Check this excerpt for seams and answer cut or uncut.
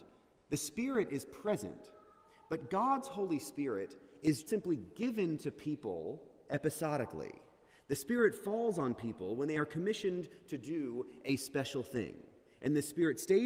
cut